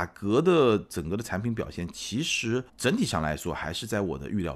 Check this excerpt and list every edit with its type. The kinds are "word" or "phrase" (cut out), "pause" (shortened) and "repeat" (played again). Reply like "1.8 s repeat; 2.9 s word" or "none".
2.7 s pause